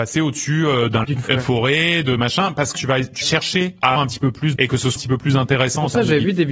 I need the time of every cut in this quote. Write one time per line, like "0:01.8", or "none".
0:01.0
0:01.3
0:02.7
0:03.2
0:04.0
0:04.6
0:05.0